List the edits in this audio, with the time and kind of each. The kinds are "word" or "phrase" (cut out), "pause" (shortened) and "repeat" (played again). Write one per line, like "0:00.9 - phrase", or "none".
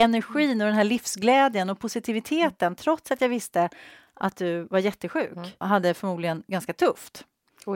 0:05.6 - word